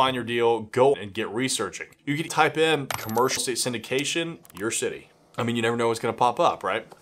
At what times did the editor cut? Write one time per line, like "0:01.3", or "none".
0:00.9
0:02.3
0:03.4
0:04.4

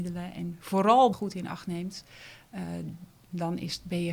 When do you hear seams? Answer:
0:01.1

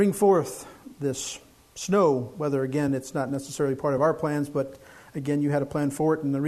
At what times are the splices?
none

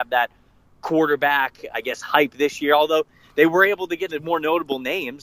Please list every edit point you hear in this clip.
0:01.7
0:04.1

